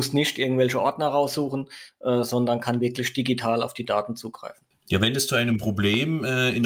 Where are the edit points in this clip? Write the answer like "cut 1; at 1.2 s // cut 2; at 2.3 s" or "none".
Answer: none